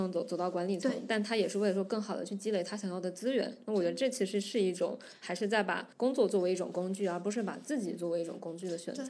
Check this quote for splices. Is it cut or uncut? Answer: cut